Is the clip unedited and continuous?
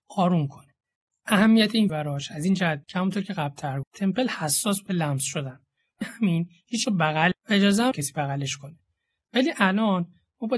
no; 8 cuts; at 1.9 s, 2.8 s, 3.8 s, 4.9 s, 6.0 s, 6.9 s, 7.3 s, 7.9 s

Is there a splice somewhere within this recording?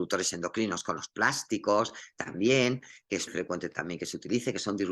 yes; 1 cut; at 3.3 s

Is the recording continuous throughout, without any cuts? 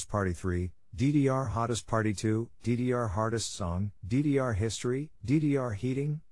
no; 2 cuts; at 4.0 s, 5.2 s

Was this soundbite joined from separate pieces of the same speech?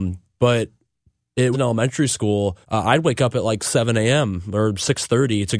yes; 2 cuts; at 1.5 s, 2.6 s

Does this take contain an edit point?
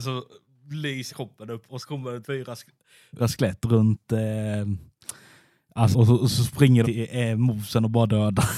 yes; 6 cuts; at 1.1 s, 1.8 s, 2.2 s, 3.2 s, 5.9 s, 6.8 s

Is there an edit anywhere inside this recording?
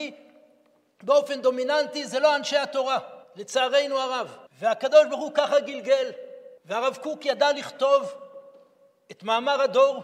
yes; 3 cuts; at 3.2 s, 4.5 s, 6.6 s

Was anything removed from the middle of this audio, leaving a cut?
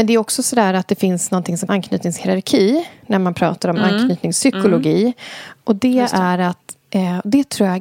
yes; 1 cut; at 1.7 s

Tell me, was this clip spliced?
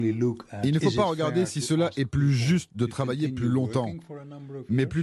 no; 0 cuts

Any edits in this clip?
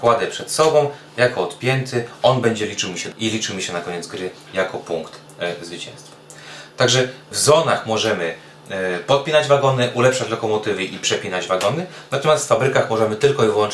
yes; 2 cuts; at 3.1 s, 7.3 s

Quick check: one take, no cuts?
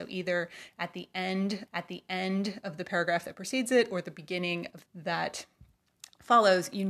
no; 2 cuts; at 1.7 s, 4.9 s

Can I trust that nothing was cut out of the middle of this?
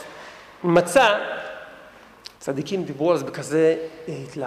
no; 1 cut; at 2.4 s

